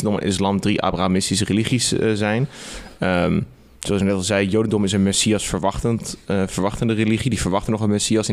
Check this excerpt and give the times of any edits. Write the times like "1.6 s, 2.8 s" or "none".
none